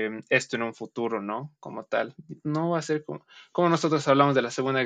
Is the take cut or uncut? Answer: uncut